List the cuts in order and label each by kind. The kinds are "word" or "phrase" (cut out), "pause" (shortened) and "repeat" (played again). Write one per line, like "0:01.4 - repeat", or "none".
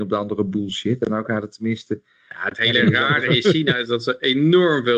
none